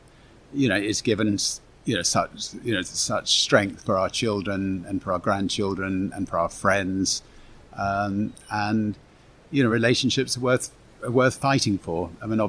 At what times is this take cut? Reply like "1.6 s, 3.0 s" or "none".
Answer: none